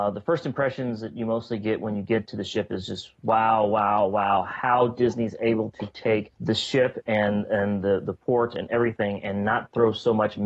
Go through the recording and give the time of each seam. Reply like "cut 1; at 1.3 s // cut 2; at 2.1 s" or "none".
cut 1; at 6.3 s